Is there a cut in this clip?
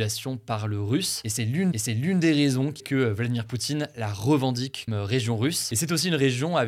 yes; 3 cuts; at 1.7 s, 2.8 s, 4.9 s

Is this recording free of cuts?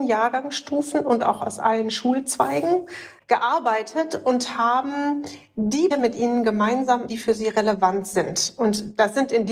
no; 2 cuts; at 5.9 s, 7.1 s

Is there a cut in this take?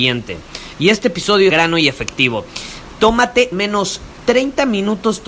yes; 2 cuts; at 1.5 s, 3.5 s

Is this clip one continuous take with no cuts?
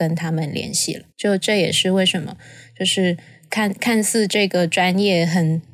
no; 1 cut; at 1.1 s

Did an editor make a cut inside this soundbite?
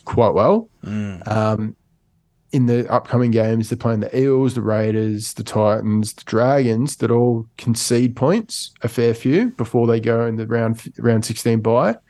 no; 0 cuts

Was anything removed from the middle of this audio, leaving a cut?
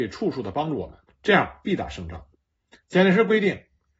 yes; 2 cuts; at 1.0 s, 2.3 s

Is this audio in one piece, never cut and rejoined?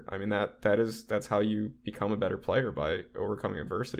yes; 0 cuts

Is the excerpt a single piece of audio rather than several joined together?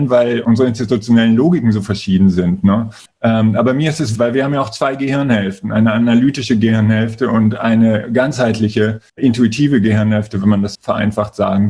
no; 4 cuts; at 3.1 s, 4.2 s, 9.1 s, 10.7 s

